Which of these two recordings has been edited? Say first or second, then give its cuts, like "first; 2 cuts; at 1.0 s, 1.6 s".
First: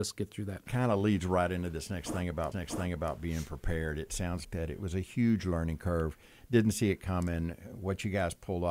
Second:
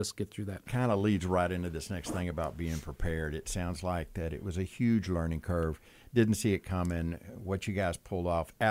first; 2 cuts; at 2.5 s, 4.4 s